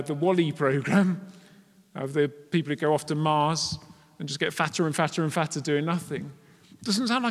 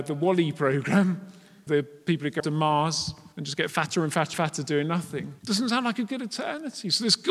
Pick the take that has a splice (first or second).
second